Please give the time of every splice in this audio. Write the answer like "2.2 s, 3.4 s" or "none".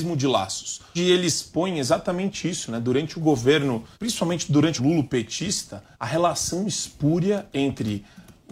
1.0 s, 3.9 s, 4.8 s, 5.9 s